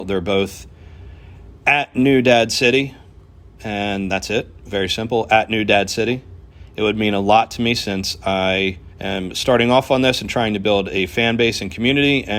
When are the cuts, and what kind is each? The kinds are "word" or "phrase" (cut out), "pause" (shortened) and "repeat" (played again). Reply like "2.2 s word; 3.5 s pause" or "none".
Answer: 8.9 s pause